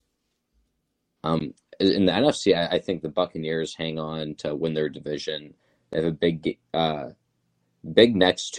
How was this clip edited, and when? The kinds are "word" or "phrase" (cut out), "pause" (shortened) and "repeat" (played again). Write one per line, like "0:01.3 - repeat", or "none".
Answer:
none